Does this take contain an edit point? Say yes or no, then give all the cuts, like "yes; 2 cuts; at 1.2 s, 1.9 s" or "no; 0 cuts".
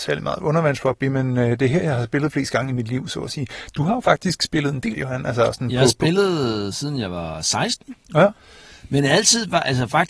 yes; 1 cut; at 4.9 s